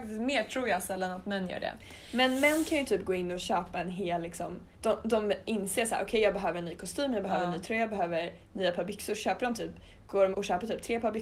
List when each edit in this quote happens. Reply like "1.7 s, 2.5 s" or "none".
4.7 s, 10.3 s